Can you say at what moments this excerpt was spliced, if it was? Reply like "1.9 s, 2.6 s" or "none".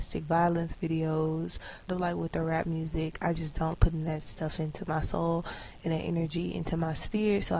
1.9 s, 3.7 s